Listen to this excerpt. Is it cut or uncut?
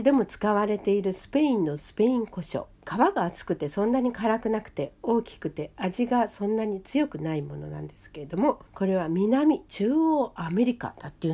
cut